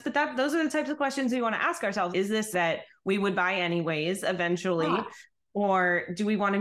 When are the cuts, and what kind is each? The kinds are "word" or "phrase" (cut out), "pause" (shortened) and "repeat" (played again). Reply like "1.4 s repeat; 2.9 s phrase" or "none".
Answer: 2.1 s word; 2.5 s word